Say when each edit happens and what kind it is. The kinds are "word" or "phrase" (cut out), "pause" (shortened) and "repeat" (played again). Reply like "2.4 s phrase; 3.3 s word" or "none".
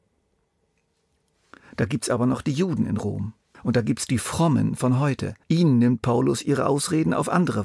3.5 s pause; 5.4 s pause